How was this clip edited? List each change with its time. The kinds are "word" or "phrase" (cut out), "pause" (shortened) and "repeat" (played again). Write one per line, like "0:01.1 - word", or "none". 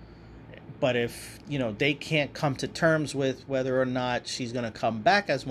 none